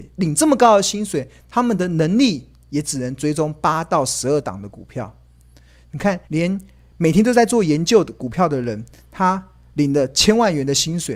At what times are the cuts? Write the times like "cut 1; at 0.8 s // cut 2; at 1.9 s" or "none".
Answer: cut 1; at 6.2 s